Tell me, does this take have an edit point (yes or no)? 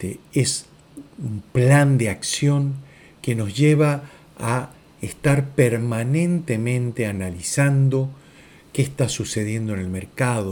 no